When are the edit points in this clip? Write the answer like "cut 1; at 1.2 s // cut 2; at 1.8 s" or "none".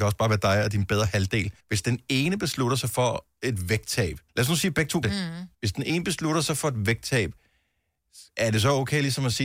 cut 1; at 1.6 s // cut 2; at 4.3 s // cut 3; at 5.0 s // cut 4; at 5.5 s // cut 5; at 8.3 s